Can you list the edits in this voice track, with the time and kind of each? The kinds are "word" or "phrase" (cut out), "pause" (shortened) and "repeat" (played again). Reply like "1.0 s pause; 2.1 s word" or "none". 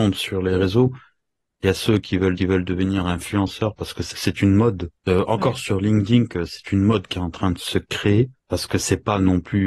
2.4 s repeat; 4.1 s word; 5.0 s pause; 8.4 s pause